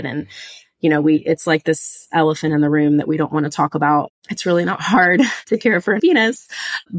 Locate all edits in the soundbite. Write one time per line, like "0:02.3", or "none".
0:06.0